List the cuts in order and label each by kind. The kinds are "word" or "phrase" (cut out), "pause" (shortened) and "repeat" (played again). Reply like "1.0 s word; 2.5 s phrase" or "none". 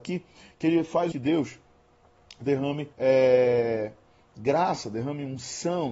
1.1 s phrase; 2.9 s pause